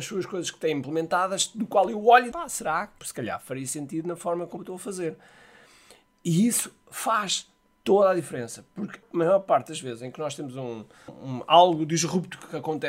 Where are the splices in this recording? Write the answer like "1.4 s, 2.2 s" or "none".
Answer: 2.3 s, 3.0 s, 4.6 s, 11.1 s